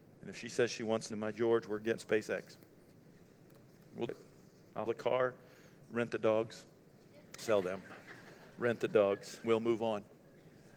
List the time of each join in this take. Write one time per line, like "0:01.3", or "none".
0:01.1
0:02.0
0:04.1
0:04.9
0:07.4
0:09.4